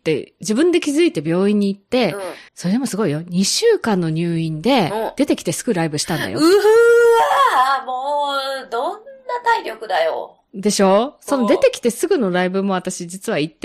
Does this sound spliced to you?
yes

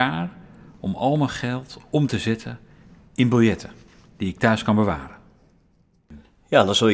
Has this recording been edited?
no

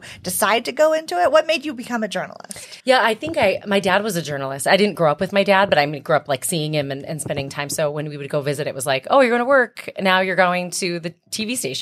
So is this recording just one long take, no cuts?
no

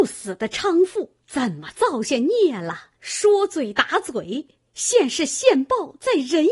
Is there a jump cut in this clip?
yes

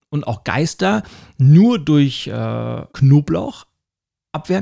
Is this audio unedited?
no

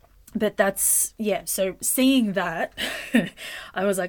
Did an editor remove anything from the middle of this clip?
no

